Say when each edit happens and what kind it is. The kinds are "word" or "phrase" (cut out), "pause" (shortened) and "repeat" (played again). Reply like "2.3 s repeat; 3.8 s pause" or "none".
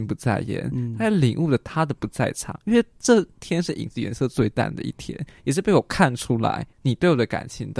6.7 s pause